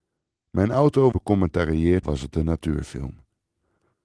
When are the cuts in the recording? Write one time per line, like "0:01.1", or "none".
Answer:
0:01.1
0:02.0